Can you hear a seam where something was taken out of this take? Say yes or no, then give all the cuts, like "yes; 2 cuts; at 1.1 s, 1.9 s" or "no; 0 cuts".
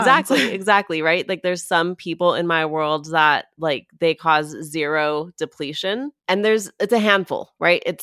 yes; 1 cut; at 6.2 s